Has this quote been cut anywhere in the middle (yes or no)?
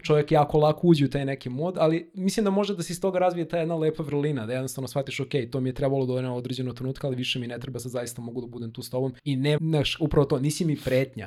yes